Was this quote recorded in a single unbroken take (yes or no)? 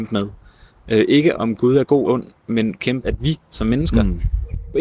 no